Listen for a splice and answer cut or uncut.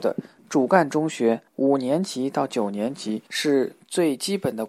cut